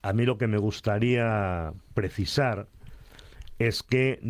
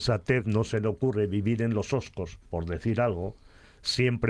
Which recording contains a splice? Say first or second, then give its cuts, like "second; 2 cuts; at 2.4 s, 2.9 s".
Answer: second; 1 cut; at 2.4 s